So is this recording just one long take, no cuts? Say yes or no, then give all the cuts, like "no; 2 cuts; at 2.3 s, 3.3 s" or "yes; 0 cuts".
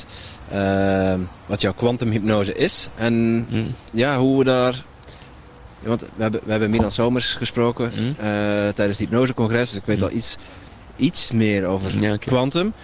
yes; 0 cuts